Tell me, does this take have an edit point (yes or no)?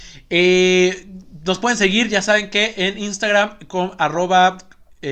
no